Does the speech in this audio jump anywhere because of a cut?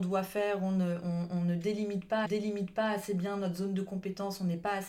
yes; 1 cut; at 2.2 s

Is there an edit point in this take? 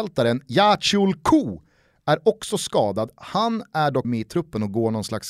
yes; 1 cut; at 4.0 s

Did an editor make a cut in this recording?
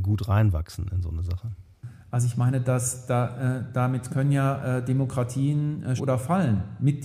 yes; 1 cut; at 6.0 s

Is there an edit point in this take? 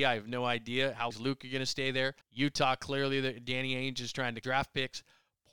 yes; 3 cuts; at 1.1 s, 2.2 s, 4.4 s

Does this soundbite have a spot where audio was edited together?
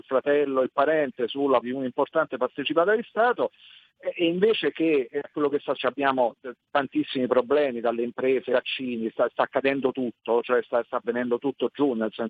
yes; 4 cuts; at 1.6 s, 5.2 s, 5.7 s, 8.5 s

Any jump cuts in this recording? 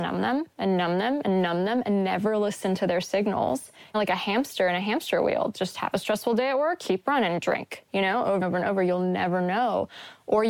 yes; 2 cuts; at 3.9 s, 8.4 s

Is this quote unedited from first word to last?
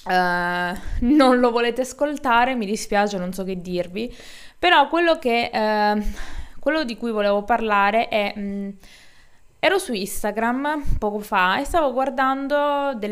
yes; 0 cuts

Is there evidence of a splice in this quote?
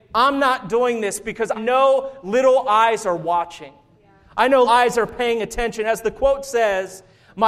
yes; 2 cuts; at 1.5 s, 4.6 s

